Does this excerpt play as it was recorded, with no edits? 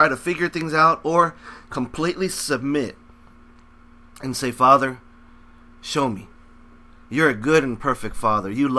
yes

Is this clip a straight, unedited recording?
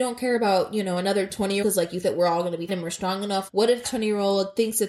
no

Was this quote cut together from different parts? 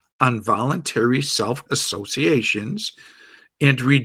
yes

